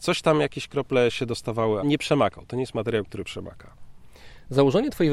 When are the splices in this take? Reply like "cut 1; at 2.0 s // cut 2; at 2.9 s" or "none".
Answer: cut 1; at 1.8 s